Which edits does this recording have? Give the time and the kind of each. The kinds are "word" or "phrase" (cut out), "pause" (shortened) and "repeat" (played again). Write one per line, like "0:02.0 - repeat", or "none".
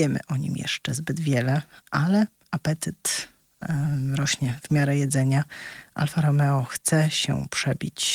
none

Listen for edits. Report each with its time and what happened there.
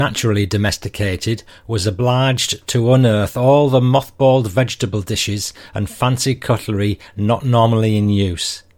none

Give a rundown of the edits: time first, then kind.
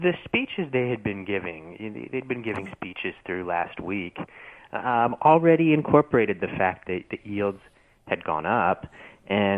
none

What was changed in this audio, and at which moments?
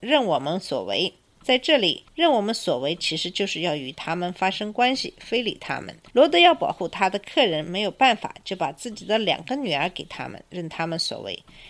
0:02.1 - pause
0:06.1 - pause

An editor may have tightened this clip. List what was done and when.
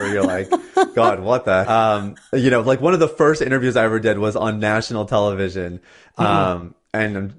0:01.6 - word

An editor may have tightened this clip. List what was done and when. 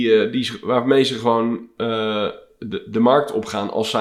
none

